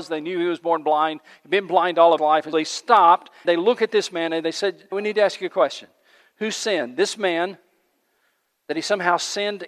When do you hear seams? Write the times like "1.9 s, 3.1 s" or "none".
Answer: 2.2 s, 2.5 s, 3.4 s, 4.9 s